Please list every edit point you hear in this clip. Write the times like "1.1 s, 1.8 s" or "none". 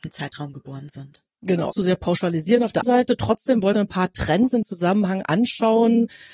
1.7 s, 2.8 s, 3.7 s, 4.6 s